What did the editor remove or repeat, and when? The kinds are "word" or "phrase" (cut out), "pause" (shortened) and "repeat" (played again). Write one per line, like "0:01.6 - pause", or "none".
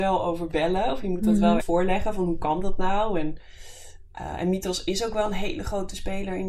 0:01.6 - word